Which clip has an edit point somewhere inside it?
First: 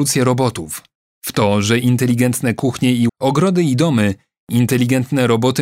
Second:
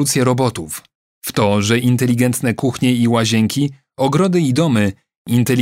first; 1 cut; at 3.1 s

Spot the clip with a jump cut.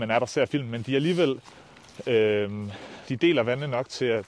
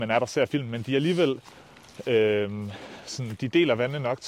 first; 1 cut; at 3.0 s

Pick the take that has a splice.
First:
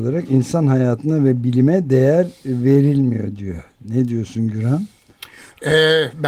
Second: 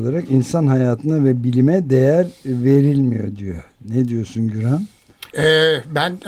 second; 1 cut; at 5.3 s

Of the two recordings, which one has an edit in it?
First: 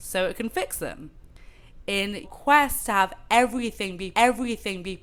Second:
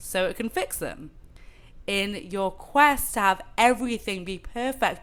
first; 2 cuts; at 2.2 s, 4.1 s

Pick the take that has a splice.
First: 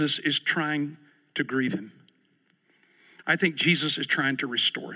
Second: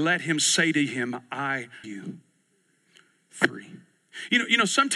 second; 1 cut; at 1.8 s

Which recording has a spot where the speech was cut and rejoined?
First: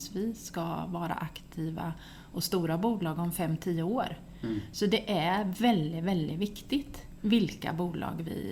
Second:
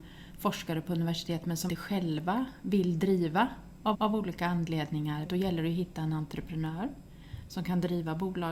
second; 3 cuts; at 1.7 s, 3.9 s, 5.2 s

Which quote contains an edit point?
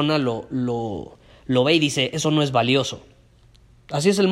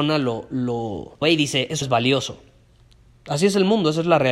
second; 2 cuts; at 1.2 s, 1.8 s

